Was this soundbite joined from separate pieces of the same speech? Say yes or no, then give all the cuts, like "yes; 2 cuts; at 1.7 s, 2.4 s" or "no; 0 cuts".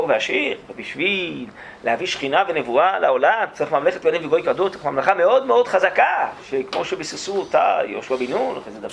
no; 0 cuts